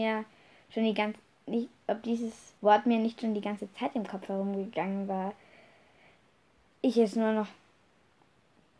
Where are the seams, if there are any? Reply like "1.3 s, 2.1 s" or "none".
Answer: 2.6 s